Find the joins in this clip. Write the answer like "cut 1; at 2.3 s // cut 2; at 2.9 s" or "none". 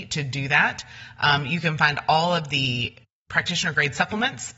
none